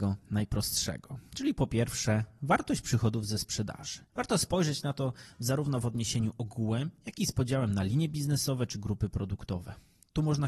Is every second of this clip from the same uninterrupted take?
no; 1 cut; at 4.1 s

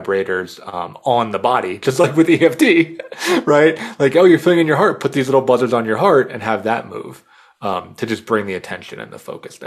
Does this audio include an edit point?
no; 0 cuts

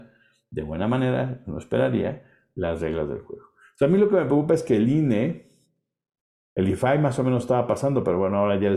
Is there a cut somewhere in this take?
no; 0 cuts

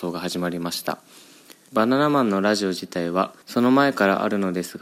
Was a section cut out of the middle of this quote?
yes; 1 cut; at 3.4 s

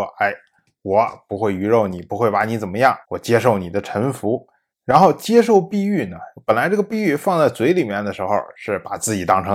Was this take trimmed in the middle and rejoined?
yes; 2 cuts; at 3.0 s, 4.7 s

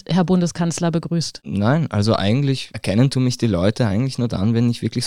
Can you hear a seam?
no; 0 cuts

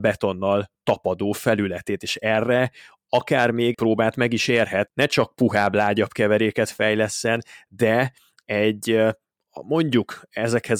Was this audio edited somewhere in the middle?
yes; 2 cuts; at 3.7 s, 4.9 s

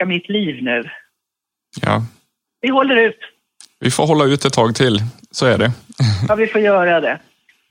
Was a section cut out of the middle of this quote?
no; 0 cuts

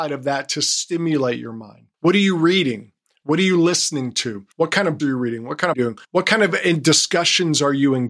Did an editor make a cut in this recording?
yes; 5 cuts; at 1.9 s, 4.5 s, 5.0 s, 5.7 s, 6.0 s

